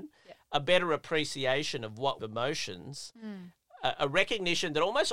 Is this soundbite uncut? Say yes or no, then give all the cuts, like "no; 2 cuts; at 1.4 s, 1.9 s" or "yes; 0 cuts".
no; 1 cut; at 2.2 s